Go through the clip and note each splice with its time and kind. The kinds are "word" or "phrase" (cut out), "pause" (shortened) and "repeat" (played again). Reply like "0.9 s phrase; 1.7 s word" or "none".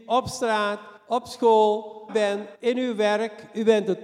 1.0 s pause; 2.1 s phrase; 2.5 s pause